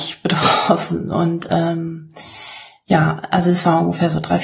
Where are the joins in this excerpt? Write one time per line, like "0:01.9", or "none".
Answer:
none